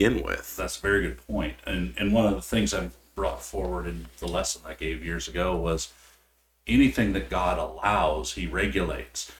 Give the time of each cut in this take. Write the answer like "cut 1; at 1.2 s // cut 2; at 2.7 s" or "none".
none